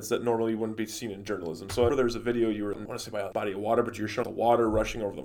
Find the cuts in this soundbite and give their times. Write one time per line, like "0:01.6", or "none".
0:01.9
0:02.7
0:03.3
0:04.2